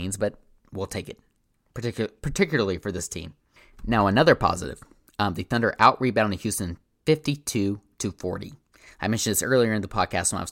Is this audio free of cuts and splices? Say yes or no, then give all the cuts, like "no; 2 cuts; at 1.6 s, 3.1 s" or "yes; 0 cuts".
yes; 0 cuts